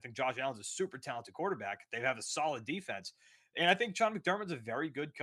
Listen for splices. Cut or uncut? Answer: uncut